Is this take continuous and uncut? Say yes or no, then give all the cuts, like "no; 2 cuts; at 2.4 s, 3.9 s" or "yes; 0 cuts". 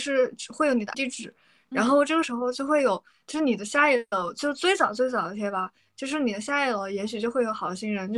no; 1 cut; at 0.9 s